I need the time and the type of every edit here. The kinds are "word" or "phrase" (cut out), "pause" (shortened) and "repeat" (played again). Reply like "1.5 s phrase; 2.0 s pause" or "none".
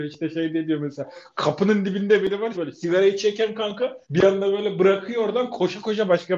2.5 s word; 4.0 s pause